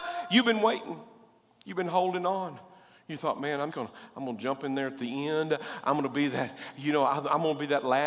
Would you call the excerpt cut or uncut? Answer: cut